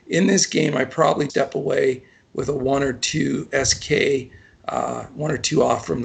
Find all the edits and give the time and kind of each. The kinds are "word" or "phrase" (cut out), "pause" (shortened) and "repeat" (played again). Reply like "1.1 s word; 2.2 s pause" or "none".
1.3 s word